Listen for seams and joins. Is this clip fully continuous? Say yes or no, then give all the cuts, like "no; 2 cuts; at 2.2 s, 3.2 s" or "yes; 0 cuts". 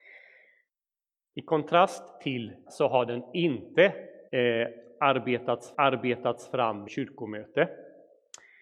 no; 4 cuts; at 2.7 s, 4.3 s, 5.7 s, 6.9 s